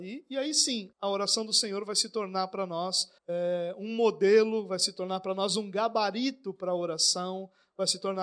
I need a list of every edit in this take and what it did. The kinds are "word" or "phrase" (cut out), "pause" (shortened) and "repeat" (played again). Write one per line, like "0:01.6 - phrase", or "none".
0:00.9 - pause
0:03.2 - pause